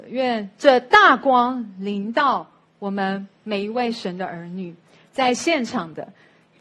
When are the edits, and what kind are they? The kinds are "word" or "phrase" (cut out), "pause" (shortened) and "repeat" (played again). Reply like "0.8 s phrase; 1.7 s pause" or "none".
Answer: none